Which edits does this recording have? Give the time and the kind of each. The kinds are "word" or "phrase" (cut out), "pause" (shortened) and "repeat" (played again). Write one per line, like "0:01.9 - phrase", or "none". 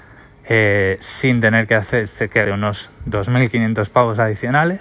0:02.4 - word